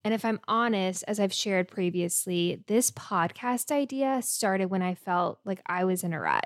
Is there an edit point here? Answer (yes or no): no